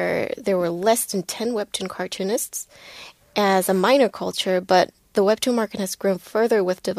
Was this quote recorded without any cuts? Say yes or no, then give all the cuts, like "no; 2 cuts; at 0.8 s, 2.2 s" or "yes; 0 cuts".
yes; 0 cuts